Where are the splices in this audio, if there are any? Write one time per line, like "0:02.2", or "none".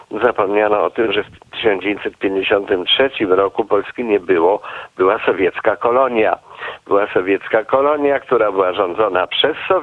none